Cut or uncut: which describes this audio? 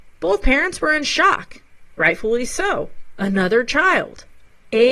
uncut